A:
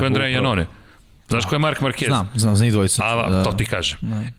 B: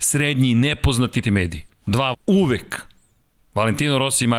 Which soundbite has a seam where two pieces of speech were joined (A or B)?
B